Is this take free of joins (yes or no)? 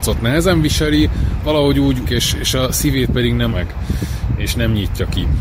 no